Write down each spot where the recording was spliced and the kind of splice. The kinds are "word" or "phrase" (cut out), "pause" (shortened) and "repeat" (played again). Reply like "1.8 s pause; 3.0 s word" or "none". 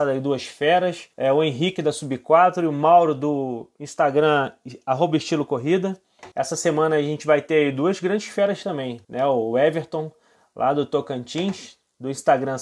1.1 s pause; 6.3 s pause; 9.0 s pause